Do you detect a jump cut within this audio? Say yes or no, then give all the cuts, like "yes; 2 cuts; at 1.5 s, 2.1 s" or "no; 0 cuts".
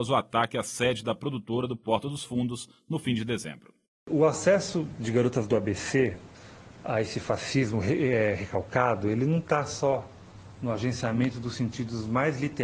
yes; 1 cut; at 3.9 s